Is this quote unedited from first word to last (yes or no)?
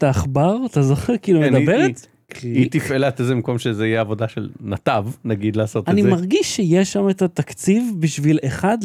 yes